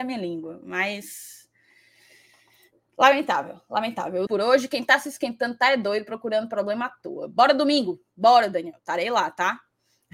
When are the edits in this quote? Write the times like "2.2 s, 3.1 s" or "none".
4.3 s

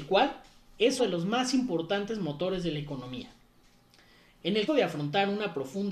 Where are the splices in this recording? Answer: 1.0 s, 4.7 s

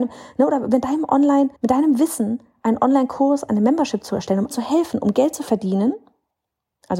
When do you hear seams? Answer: 1.6 s, 4.5 s

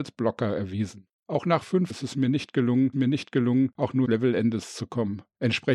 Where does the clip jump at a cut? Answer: 1.9 s, 2.9 s, 4.0 s

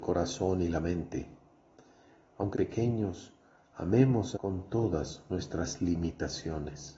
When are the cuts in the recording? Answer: 2.5 s, 4.3 s

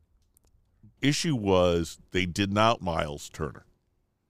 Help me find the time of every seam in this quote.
1.0 s, 2.8 s

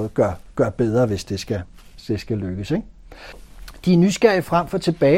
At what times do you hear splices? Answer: none

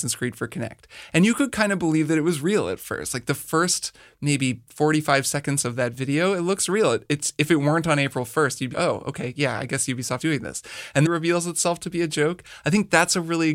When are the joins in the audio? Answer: 8.7 s, 10.2 s, 11.0 s

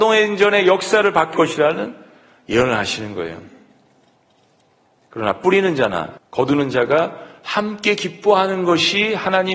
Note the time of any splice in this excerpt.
1.3 s, 6.2 s

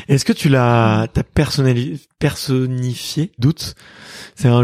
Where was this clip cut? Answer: 3.4 s

